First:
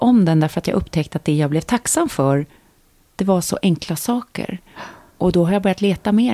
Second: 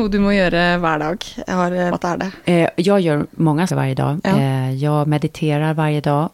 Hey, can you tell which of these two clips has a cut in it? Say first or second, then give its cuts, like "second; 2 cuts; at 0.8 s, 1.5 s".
second; 3 cuts; at 1.9 s, 2.4 s, 3.7 s